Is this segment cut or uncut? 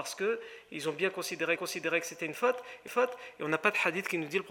cut